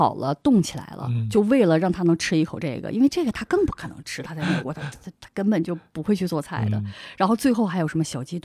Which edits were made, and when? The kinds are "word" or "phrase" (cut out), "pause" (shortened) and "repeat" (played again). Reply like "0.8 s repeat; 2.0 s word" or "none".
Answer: 4.9 s pause